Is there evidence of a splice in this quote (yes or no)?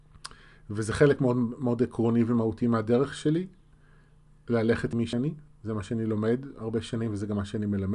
no